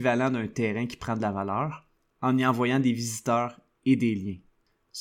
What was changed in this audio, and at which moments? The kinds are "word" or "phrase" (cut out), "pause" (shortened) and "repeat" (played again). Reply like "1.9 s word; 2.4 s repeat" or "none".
none